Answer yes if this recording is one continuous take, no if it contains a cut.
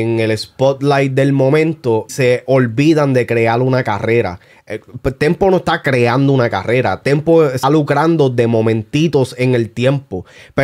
no